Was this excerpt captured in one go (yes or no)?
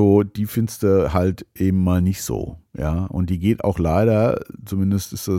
yes